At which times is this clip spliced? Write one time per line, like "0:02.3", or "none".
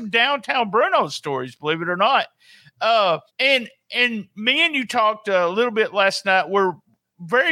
0:03.3